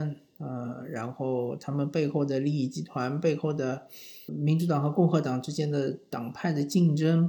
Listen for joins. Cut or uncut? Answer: cut